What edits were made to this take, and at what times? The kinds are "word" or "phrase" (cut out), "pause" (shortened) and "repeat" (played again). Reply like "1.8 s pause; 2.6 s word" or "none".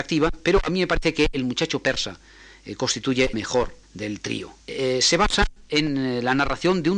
3.3 s word; 3.8 s pause; 4.6 s pause

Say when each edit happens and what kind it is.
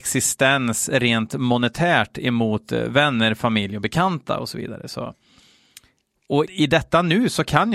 6.5 s word

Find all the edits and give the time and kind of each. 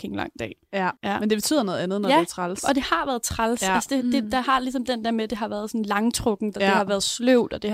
1.0 s pause

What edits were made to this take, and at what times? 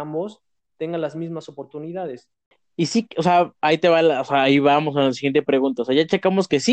none

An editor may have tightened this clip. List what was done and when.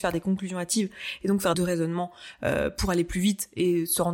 1.5 s phrase

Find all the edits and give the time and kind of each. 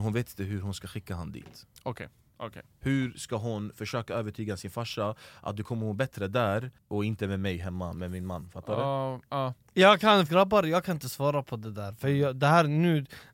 10.3 s word

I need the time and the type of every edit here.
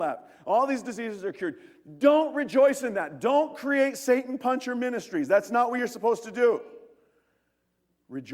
none

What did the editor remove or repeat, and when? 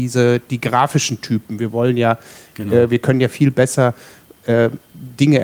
none

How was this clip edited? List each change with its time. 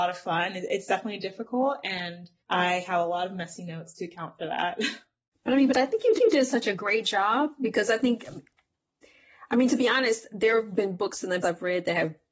2.4 s pause; 6.2 s repeat; 11.4 s word

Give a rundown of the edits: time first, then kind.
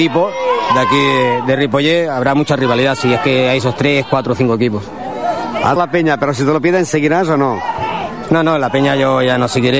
5.8 s word

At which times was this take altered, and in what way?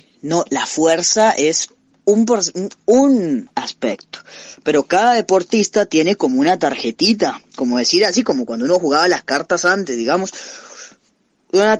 1.9 s pause

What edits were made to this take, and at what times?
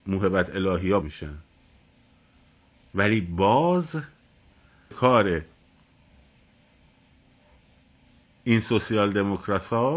1.0 s word; 4.9 s word

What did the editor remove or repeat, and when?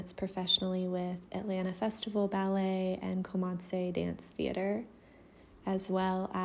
none

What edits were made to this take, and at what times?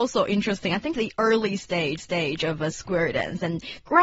0.9 s word; 2.0 s repeat

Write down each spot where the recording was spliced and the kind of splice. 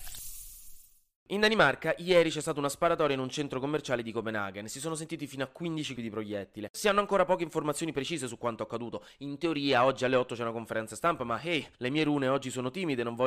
5.9 s word; 11.7 s pause

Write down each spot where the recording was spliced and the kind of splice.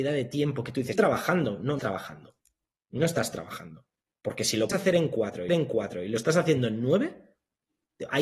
0.9 s word; 1.8 s word; 4.7 s word; 5.5 s repeat

